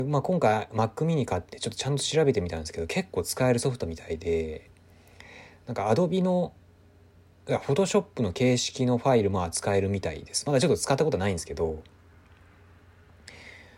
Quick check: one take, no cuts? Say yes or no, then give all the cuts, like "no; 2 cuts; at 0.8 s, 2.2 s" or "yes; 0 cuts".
yes; 0 cuts